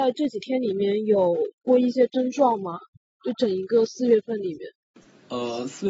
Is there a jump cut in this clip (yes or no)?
no